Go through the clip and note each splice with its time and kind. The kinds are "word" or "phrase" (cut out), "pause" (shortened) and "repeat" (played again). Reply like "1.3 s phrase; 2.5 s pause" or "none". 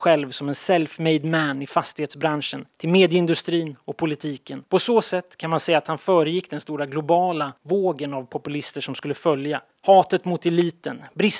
2.7 s pause; 4.7 s pause; 7.6 s pause; 9.7 s pause